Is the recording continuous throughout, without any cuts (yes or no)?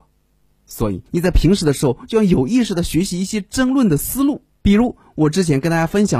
no